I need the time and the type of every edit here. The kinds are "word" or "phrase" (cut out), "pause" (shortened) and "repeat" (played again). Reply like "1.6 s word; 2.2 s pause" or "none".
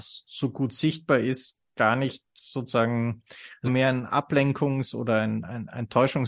3.7 s word

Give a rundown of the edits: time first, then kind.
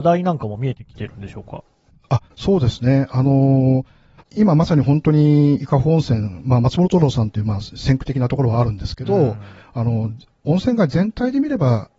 2.3 s pause; 4.2 s phrase

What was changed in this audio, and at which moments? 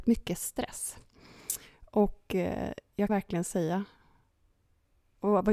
3.1 s word

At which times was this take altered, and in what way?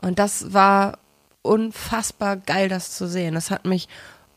none

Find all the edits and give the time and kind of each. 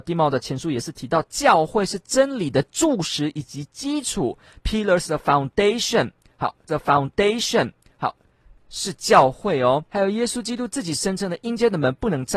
6.7 s repeat; 9.9 s pause

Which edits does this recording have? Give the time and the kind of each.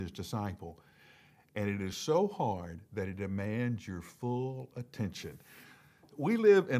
none

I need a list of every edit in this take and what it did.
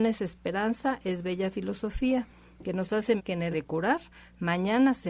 3.2 s word; 3.5 s word

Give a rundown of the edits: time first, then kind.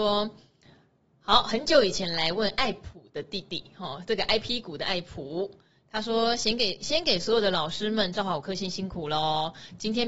none

